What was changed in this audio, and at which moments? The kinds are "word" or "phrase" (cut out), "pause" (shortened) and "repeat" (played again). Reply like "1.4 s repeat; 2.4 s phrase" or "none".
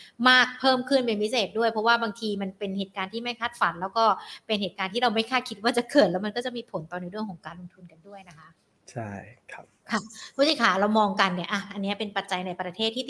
8.6 s pause

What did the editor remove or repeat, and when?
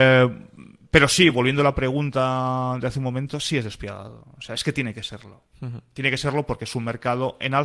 none

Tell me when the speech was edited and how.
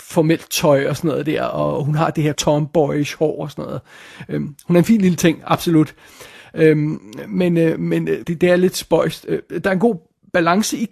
2.3 s word; 8.2 s word

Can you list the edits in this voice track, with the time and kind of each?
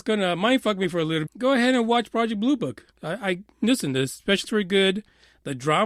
1.3 s word; 2.9 s pause; 4.4 s word

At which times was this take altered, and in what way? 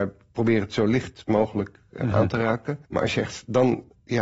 2.8 s pause

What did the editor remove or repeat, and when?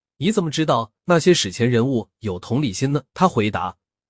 3.1 s pause

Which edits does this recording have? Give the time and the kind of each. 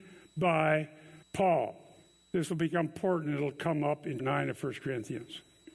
1.2 s pause; 4.2 s word

